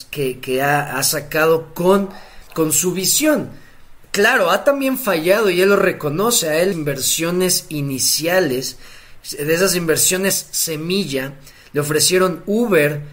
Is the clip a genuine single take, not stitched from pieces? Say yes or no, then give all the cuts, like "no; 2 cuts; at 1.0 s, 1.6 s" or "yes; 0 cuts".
no; 3 cuts; at 2.5 s, 4.0 s, 6.7 s